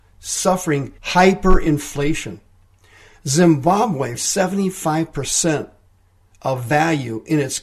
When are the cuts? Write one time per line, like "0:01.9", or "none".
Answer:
0:01.0
0:04.2